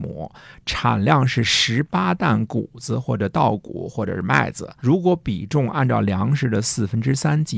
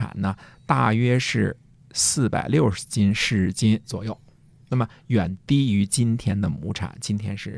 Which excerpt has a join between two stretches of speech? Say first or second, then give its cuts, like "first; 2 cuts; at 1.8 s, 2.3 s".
first; 1 cut; at 4.8 s